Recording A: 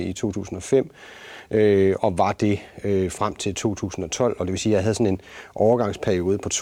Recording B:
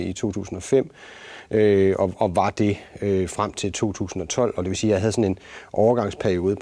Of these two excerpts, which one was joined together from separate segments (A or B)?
A